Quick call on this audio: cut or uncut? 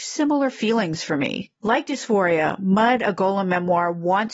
cut